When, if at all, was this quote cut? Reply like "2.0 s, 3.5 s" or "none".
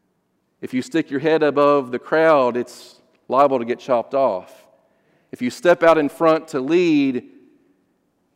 none